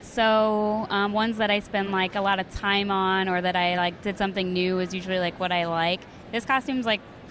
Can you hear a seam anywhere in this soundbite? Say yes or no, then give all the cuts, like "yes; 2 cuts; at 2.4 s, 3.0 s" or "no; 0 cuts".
no; 0 cuts